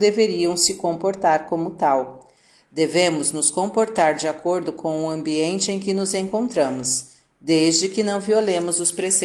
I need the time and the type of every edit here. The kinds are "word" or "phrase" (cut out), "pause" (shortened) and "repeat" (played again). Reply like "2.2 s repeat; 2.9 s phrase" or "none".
none